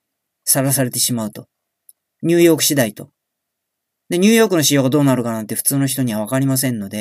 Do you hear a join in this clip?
no; 0 cuts

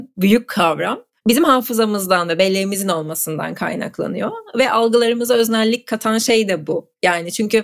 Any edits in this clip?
yes; 1 cut; at 1.2 s

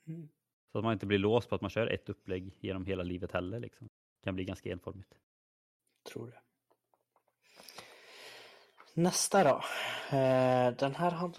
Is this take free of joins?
no; 1 cut; at 4.0 s

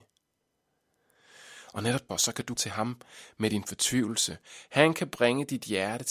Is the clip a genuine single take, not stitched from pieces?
no; 2 cuts; at 2.1 s, 2.6 s

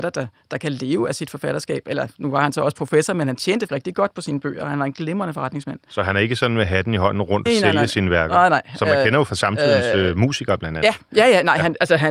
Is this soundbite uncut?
no; 2 cuts; at 3.7 s, 7.5 s

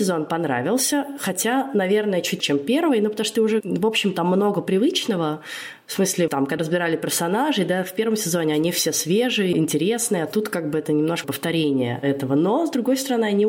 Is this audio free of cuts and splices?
no; 6 cuts; at 2.4 s, 3.6 s, 6.3 s, 6.6 s, 9.5 s, 11.2 s

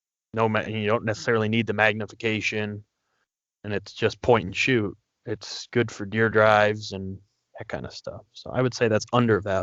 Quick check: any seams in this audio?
no; 0 cuts

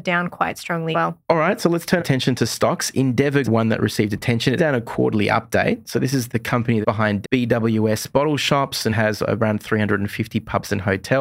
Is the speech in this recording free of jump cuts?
no; 9 cuts; at 0.9 s, 1.2 s, 2.0 s, 3.4 s, 4.6 s, 6.3 s, 6.8 s, 7.2 s, 8.9 s

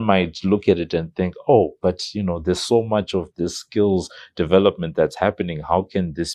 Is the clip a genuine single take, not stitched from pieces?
yes; 0 cuts

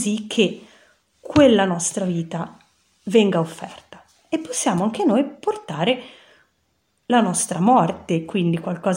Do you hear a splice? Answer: no; 0 cuts

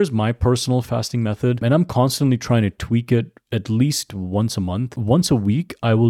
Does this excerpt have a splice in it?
no; 0 cuts

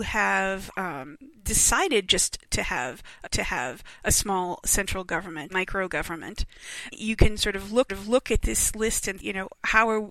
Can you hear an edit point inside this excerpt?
yes; 5 cuts; at 3.2 s, 5.5 s, 6.9 s, 7.9 s, 9.2 s

